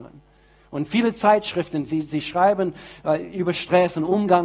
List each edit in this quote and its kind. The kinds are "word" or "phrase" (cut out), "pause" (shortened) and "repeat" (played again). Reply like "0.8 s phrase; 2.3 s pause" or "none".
none